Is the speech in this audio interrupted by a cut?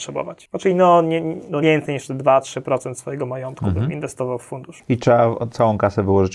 yes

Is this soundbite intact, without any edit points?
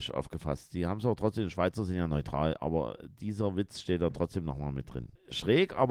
yes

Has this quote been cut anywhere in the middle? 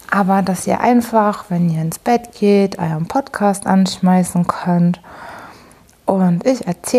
no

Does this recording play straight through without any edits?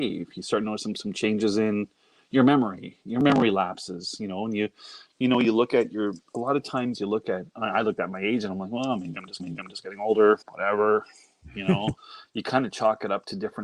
no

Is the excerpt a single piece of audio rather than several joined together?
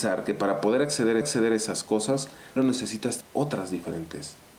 no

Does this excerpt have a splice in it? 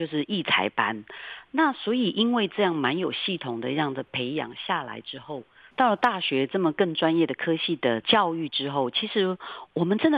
no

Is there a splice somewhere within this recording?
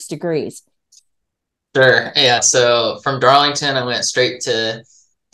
no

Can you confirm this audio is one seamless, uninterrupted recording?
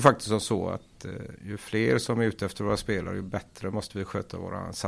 no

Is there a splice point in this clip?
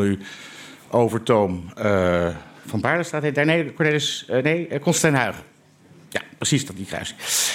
no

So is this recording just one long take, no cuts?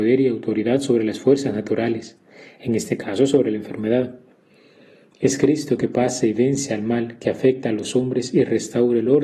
yes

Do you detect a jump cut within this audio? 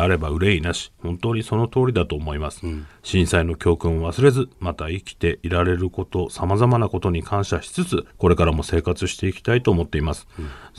yes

